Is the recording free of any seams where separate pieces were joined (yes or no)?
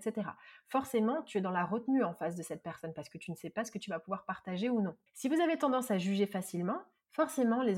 no